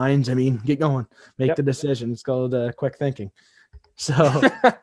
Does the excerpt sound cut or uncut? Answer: uncut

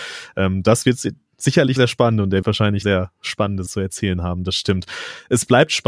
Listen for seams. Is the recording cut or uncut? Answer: cut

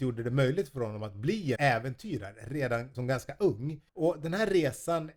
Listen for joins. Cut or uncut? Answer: cut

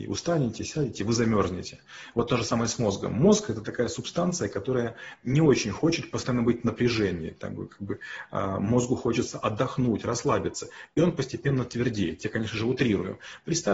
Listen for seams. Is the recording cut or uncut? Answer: uncut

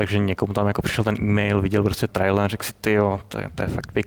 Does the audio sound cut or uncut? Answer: cut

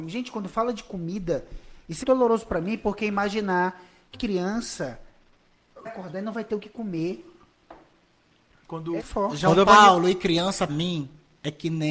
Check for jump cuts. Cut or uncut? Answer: cut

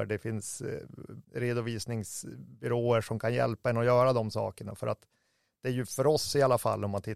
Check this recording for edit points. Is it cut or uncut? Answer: cut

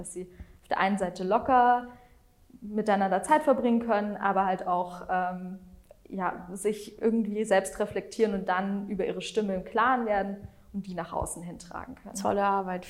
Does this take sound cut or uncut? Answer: uncut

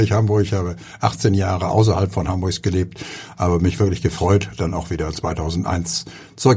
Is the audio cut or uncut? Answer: uncut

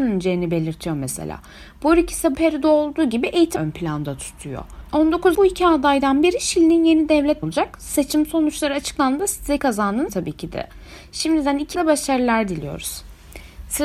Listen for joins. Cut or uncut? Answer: cut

